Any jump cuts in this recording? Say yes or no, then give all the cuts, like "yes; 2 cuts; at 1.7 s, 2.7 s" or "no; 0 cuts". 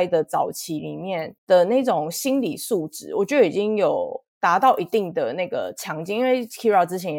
yes; 1 cut; at 1.4 s